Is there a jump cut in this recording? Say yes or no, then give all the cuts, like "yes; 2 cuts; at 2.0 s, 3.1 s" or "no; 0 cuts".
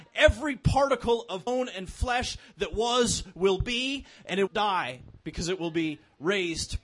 yes; 2 cuts; at 1.5 s, 4.5 s